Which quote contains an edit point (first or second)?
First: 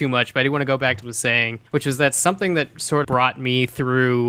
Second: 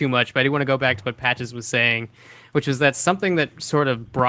first